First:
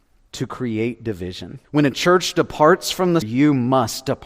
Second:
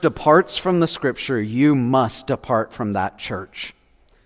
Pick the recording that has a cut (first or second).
first